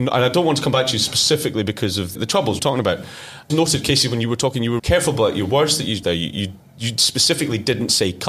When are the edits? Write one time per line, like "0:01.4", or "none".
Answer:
0:02.1
0:02.6
0:03.5
0:04.8
0:06.0